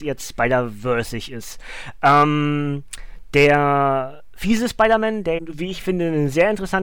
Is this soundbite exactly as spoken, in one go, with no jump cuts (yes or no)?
no